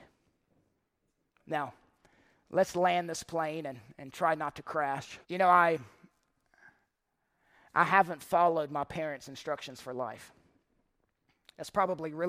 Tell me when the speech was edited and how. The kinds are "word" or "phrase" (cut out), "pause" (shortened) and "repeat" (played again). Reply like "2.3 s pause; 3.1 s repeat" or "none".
5.2 s pause